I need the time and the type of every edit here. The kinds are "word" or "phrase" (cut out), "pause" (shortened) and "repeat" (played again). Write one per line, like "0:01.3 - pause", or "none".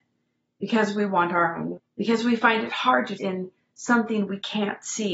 0:01.8 - word
0:03.2 - word